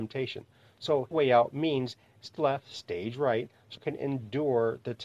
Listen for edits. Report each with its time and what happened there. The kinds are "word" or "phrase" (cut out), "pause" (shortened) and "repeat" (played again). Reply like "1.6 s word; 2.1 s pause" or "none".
1.1 s phrase; 2.4 s phrase; 3.8 s phrase